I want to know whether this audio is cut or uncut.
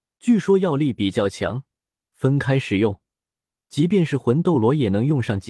uncut